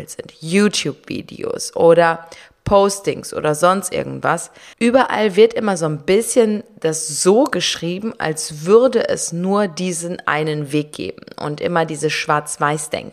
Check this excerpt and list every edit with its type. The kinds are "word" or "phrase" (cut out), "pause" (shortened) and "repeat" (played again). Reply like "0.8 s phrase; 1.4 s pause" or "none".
4.7 s pause